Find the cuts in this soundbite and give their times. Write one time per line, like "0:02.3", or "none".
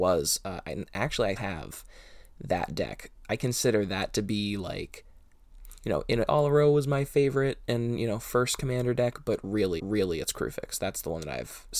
0:01.4
0:06.3
0:09.8